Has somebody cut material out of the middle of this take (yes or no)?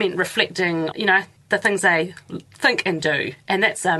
yes